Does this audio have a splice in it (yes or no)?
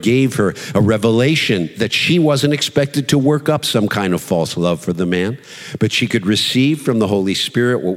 no